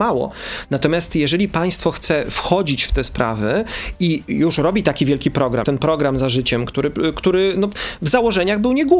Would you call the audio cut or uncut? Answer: cut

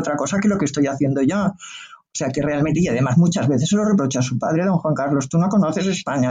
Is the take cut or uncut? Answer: uncut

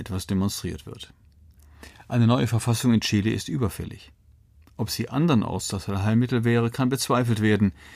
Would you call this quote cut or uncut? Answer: uncut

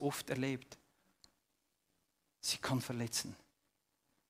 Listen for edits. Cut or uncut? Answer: cut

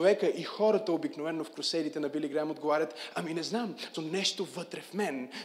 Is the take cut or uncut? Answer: cut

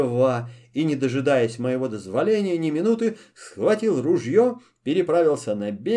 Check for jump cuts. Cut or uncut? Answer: uncut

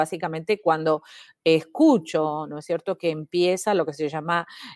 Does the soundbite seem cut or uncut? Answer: uncut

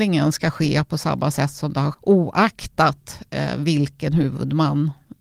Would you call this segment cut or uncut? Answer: cut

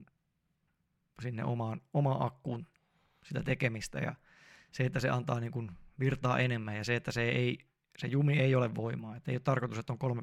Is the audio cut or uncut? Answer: uncut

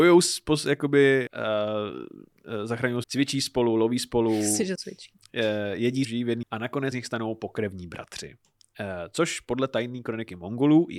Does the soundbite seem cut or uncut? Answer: cut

